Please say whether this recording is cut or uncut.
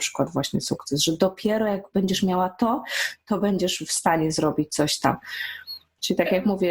uncut